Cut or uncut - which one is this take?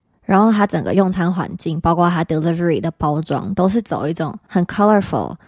uncut